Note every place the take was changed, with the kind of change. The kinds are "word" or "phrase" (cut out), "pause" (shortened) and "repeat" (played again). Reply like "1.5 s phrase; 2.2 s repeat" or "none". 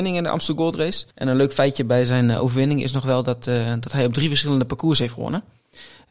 1.1 s pause